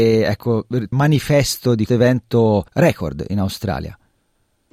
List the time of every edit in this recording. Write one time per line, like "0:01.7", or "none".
0:00.9
0:01.9
0:02.7